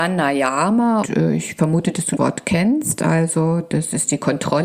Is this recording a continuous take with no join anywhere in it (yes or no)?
no